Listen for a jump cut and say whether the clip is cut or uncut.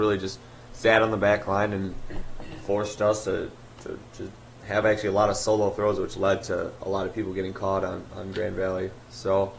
uncut